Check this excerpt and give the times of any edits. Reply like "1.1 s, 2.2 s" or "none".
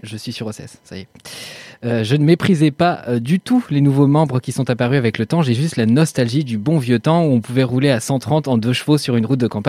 none